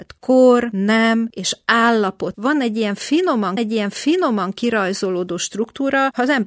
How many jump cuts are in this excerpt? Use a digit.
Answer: 2